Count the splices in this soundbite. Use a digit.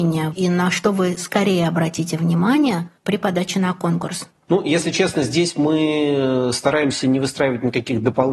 2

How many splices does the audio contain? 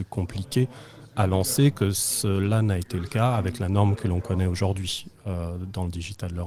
0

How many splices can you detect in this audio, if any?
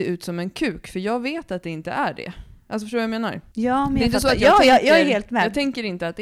1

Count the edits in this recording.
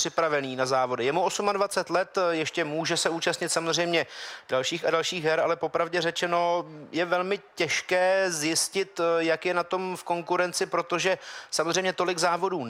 0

